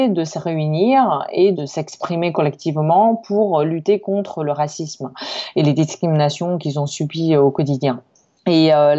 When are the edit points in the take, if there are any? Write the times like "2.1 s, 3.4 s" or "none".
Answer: none